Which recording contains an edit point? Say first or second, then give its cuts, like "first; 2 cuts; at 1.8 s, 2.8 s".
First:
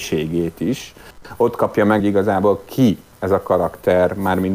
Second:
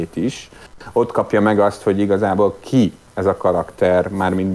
first; 1 cut; at 2.0 s